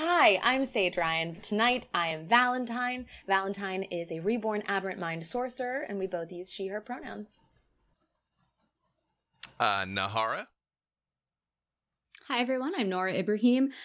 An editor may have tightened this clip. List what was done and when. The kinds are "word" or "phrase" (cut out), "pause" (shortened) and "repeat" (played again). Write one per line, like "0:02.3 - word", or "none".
none